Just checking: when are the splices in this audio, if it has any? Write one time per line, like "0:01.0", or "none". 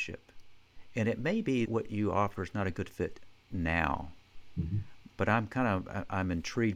0:01.7